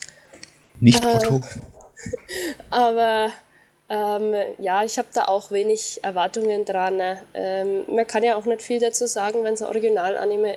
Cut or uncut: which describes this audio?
uncut